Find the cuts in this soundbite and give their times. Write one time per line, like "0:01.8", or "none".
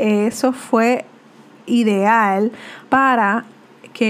0:02.8